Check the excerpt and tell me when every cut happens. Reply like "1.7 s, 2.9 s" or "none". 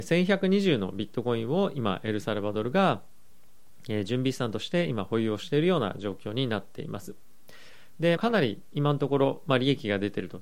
8.2 s